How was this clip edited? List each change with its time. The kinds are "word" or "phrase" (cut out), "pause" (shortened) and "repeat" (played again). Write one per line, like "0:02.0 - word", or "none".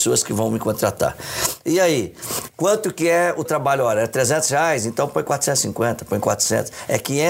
0:03.5 - word